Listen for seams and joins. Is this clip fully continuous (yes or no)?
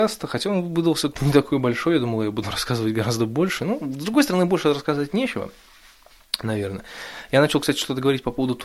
yes